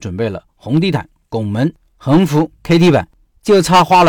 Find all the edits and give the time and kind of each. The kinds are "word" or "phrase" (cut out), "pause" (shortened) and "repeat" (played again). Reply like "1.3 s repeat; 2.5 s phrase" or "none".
none